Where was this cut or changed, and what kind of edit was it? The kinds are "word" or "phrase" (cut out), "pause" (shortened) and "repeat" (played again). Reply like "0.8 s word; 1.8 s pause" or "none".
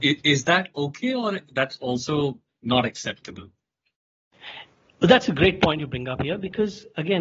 none